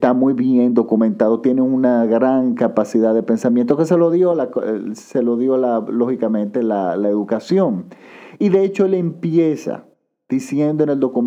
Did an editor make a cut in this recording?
no; 0 cuts

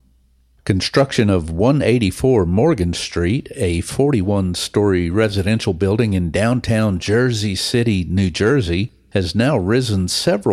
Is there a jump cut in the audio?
no; 0 cuts

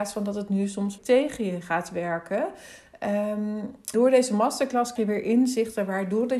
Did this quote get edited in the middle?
yes; 3 cuts; at 1.0 s, 3.9 s, 5.0 s

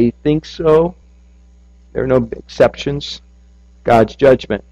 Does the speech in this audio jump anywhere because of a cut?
no; 0 cuts

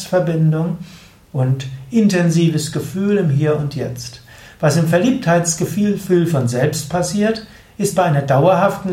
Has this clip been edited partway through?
no; 0 cuts

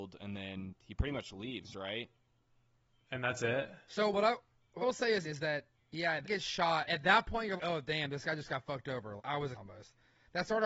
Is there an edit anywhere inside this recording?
yes; 8 cuts; at 4.1 s, 4.8 s, 5.2 s, 6.2 s, 6.9 s, 7.6 s, 9.2 s, 9.5 s

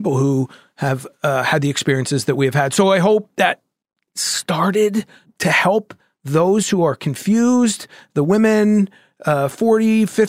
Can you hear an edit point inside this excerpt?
no; 0 cuts

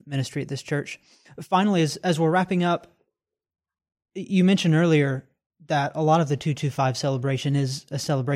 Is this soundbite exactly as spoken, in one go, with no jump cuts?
yes; 0 cuts

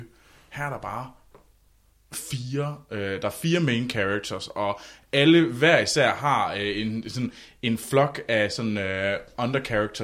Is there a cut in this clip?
no; 0 cuts

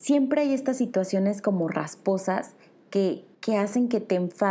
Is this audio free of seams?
no; 1 cut; at 3.3 s

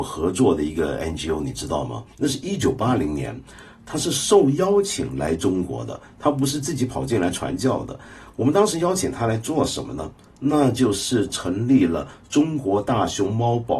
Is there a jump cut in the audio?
no; 0 cuts

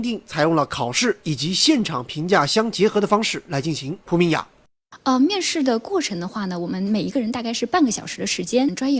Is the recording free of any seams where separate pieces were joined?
no; 1 cut; at 4.0 s

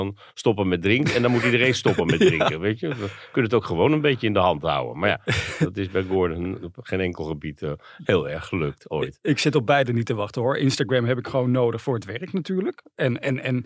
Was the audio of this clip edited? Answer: no; 0 cuts

